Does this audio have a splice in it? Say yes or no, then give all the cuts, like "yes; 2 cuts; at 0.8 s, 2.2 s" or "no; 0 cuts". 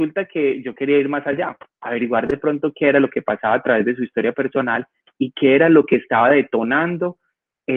no; 0 cuts